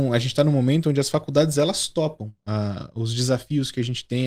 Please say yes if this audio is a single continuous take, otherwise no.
yes